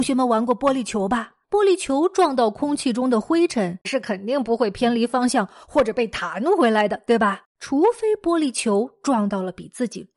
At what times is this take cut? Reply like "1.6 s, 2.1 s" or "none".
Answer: 1.4 s, 3.8 s, 7.5 s